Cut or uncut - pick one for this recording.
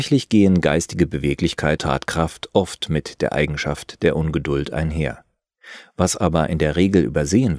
cut